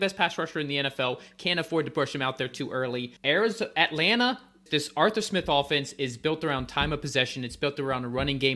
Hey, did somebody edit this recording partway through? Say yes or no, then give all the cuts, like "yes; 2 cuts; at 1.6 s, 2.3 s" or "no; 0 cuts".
yes; 2 cuts; at 3.2 s, 4.7 s